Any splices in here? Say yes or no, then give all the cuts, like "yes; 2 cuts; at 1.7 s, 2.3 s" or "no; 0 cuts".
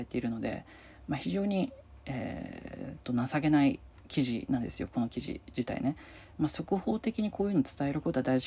no; 0 cuts